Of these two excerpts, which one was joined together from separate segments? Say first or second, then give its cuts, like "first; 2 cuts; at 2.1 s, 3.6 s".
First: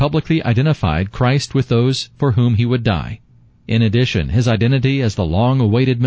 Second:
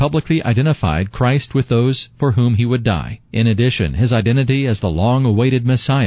second; 1 cut; at 3.3 s